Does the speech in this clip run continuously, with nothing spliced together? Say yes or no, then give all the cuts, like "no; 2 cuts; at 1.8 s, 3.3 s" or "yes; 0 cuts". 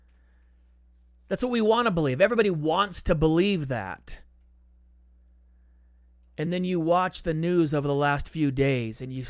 yes; 0 cuts